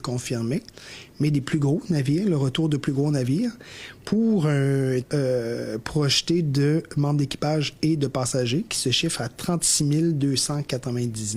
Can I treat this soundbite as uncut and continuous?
no; 1 cut; at 5.0 s

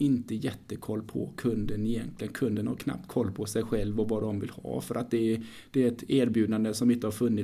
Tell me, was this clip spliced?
no; 0 cuts

